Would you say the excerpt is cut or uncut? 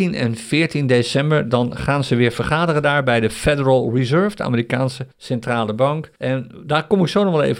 cut